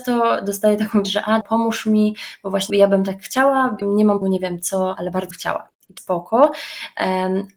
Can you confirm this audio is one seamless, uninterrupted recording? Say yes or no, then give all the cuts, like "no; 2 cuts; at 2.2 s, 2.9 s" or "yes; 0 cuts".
no; 8 cuts; at 1.0 s, 1.4 s, 2.7 s, 3.8 s, 4.2 s, 5.0 s, 5.3 s, 6.0 s